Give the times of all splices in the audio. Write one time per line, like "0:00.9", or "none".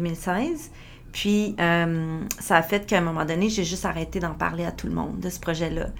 none